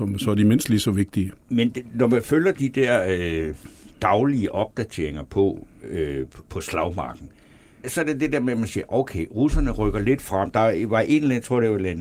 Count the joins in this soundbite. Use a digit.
1